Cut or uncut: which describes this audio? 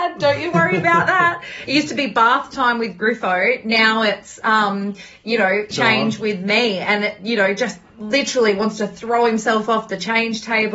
cut